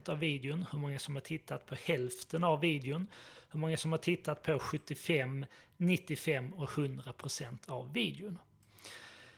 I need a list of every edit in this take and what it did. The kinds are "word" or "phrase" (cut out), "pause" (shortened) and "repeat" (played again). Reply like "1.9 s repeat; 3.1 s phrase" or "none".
none